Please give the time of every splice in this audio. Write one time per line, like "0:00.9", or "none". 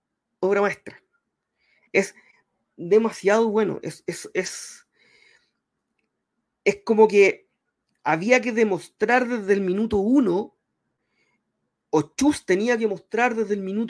none